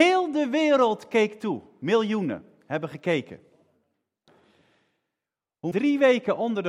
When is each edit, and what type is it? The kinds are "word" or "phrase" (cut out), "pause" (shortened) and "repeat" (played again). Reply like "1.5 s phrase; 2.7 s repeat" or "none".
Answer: 5.7 s word